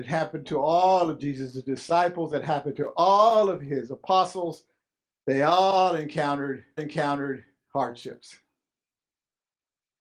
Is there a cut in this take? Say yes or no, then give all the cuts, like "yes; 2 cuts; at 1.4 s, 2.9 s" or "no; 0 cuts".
yes; 2 cuts; at 5.1 s, 6.8 s